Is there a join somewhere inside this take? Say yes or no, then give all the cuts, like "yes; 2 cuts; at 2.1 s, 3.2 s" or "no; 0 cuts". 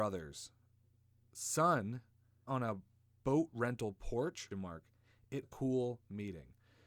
yes; 3 cuts; at 2.5 s, 4.5 s, 5.4 s